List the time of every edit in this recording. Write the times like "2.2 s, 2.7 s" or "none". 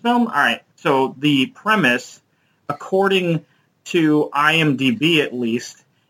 none

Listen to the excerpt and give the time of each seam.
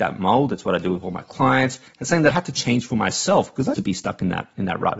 2.3 s, 3.7 s

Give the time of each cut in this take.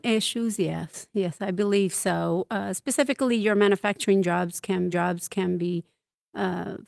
4.9 s

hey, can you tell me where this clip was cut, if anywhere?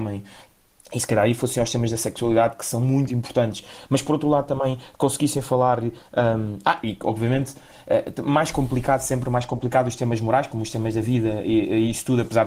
none

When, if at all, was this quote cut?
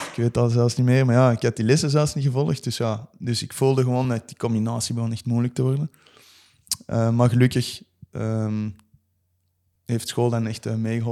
none

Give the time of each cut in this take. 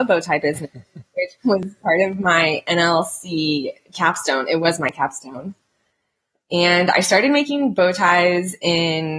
none

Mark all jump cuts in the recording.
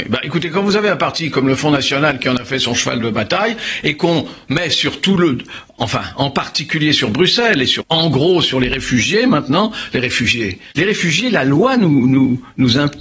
7.8 s, 10.7 s

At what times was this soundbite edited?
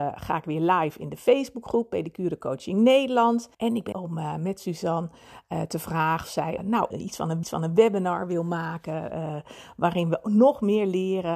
3.5 s, 3.9 s, 6.2 s, 6.6 s, 6.9 s, 7.4 s

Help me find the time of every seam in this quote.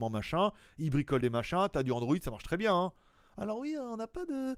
none

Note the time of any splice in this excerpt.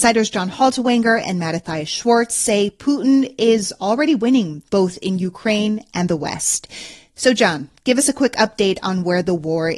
4.6 s

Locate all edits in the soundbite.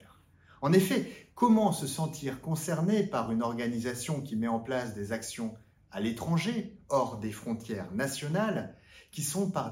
none

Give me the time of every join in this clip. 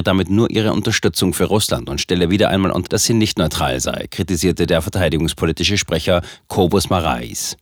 2.9 s

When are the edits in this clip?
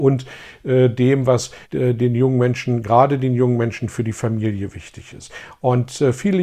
1.6 s

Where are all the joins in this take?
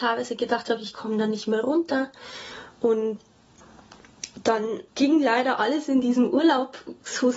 4.9 s

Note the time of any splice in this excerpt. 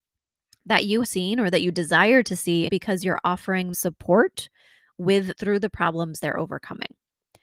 1.0 s, 2.7 s, 3.7 s, 5.3 s

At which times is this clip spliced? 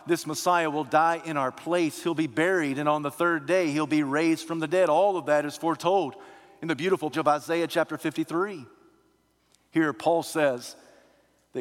7.1 s

